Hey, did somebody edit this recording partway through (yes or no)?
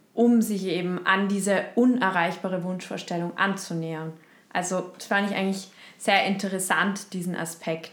no